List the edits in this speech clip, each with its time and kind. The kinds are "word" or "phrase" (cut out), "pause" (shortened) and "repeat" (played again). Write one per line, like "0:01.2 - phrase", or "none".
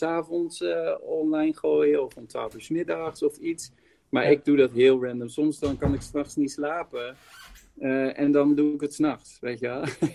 none